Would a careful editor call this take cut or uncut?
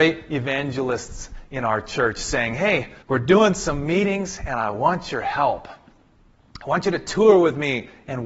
cut